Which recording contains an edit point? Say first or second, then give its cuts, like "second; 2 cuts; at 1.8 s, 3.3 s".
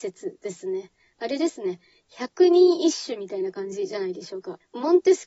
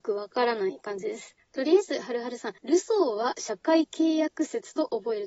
second; 1 cut; at 2.6 s